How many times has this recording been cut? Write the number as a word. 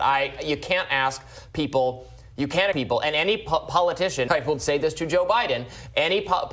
two